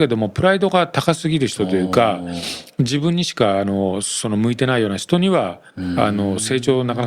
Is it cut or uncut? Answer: cut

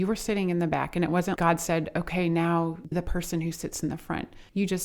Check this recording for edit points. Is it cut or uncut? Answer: cut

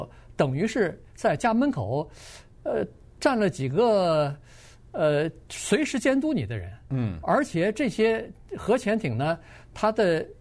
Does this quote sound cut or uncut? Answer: uncut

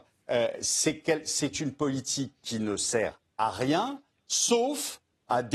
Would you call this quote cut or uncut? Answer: uncut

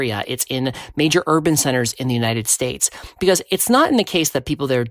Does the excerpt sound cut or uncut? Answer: uncut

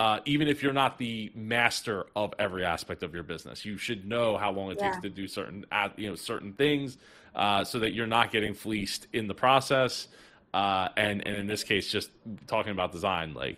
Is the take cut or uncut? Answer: uncut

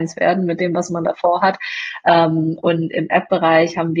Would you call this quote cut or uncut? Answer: uncut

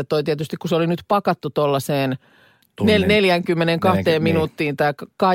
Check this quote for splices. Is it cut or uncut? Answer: uncut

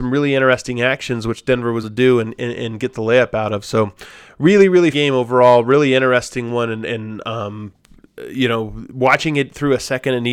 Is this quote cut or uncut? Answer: cut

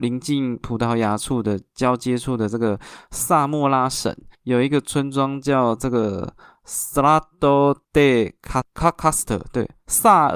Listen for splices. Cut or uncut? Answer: cut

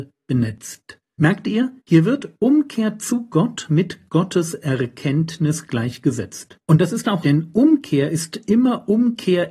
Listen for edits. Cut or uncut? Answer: cut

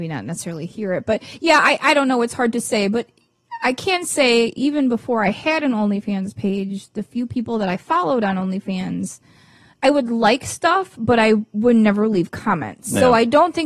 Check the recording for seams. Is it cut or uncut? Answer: uncut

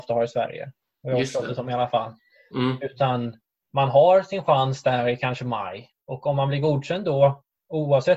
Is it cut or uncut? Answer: uncut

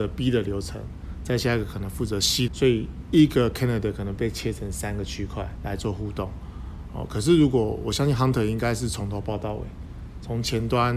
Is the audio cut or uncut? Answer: cut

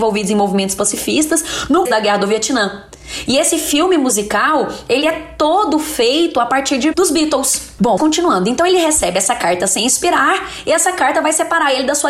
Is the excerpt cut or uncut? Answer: cut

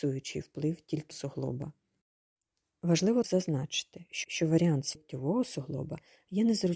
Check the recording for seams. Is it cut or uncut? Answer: cut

